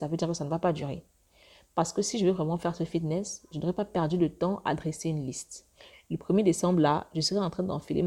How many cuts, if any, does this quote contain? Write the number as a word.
zero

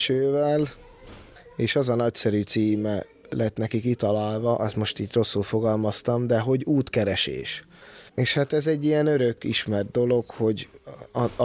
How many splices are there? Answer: one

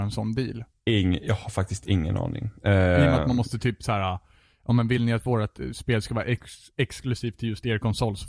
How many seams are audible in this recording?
zero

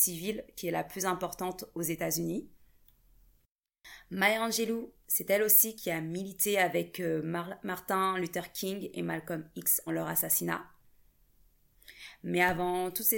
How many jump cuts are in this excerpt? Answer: one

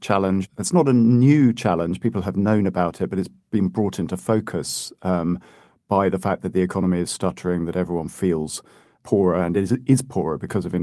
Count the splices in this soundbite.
zero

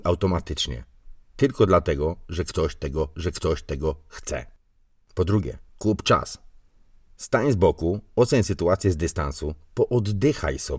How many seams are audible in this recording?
two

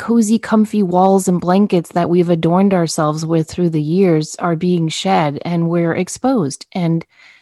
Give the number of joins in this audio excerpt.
zero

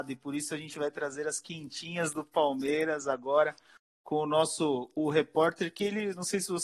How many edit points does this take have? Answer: zero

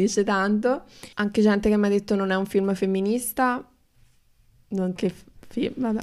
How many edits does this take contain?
two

